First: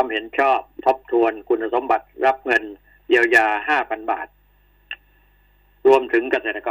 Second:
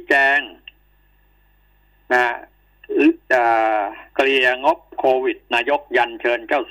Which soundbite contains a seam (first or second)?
second